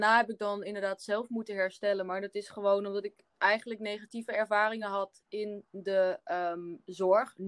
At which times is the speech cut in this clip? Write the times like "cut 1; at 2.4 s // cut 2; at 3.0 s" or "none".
none

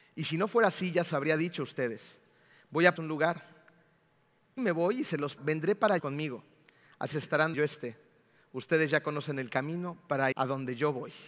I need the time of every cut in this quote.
cut 1; at 1.1 s // cut 2; at 3.0 s // cut 3; at 4.6 s // cut 4; at 5.4 s // cut 5; at 6.0 s // cut 6; at 7.1 s // cut 7; at 7.5 s // cut 8; at 10.3 s

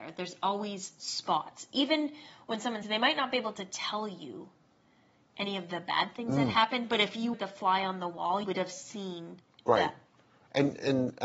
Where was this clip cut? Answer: cut 1; at 2.8 s // cut 2; at 7.3 s // cut 3; at 8.4 s

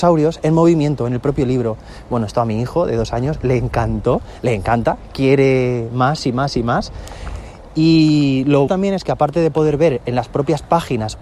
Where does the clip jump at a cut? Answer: cut 1; at 8.7 s

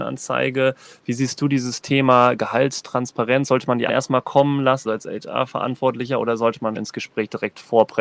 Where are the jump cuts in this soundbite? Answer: cut 1; at 3.9 s // cut 2; at 4.9 s // cut 3; at 6.8 s

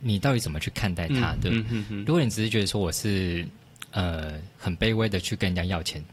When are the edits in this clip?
cut 1; at 4.5 s

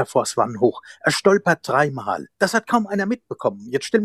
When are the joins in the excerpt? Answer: cut 1; at 2.3 s

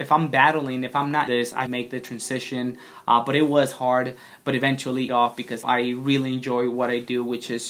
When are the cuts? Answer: cut 1; at 1.3 s // cut 2; at 1.7 s // cut 3; at 5.1 s // cut 4; at 5.6 s

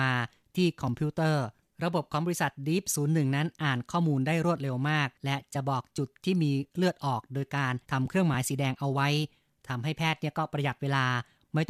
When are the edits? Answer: cut 1; at 5.2 s // cut 2; at 7.8 s

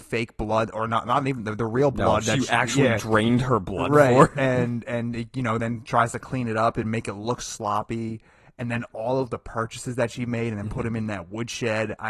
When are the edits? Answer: none

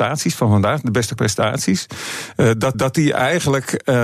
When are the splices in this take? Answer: cut 1; at 1.2 s // cut 2; at 2.7 s

